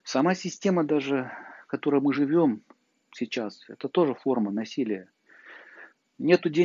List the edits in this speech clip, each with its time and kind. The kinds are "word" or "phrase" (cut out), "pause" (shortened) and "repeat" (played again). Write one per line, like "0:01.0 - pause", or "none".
none